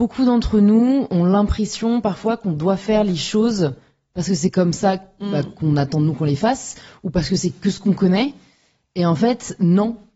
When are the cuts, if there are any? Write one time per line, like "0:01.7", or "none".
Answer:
none

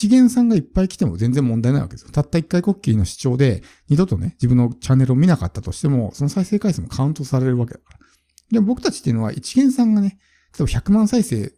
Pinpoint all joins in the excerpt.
none

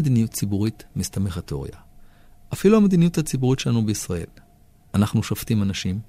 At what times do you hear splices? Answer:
0:01.4

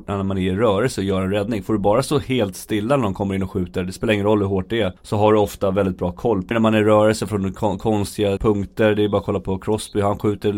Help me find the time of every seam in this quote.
0:05.0
0:06.5
0:08.4

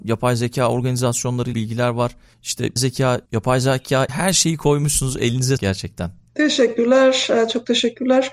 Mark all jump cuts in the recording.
0:01.5
0:02.8
0:03.3
0:04.1
0:05.6

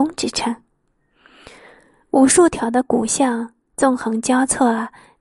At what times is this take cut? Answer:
none

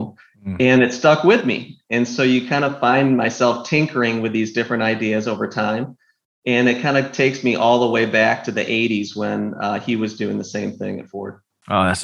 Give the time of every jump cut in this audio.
none

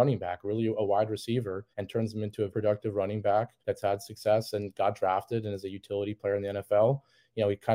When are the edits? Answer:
0:01.7
0:02.5
0:03.6

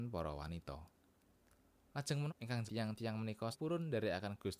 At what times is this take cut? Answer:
0:02.3
0:02.7
0:03.5

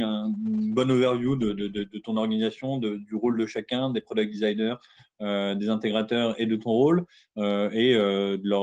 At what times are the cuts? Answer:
none

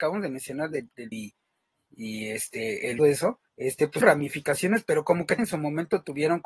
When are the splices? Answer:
0:01.1
0:03.0
0:03.5
0:04.0
0:05.4

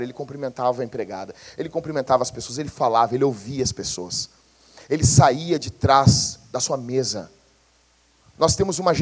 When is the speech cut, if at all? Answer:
none

